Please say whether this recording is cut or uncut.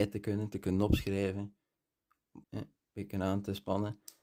cut